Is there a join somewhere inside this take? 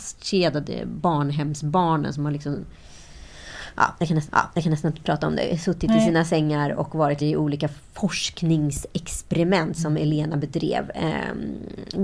yes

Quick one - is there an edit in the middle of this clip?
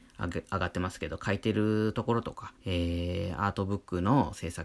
yes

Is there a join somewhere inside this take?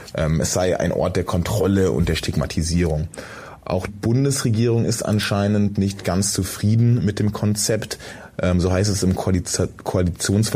yes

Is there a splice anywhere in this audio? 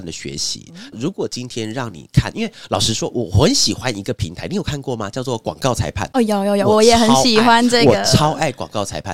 yes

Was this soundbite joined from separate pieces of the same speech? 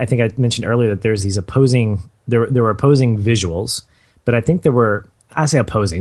no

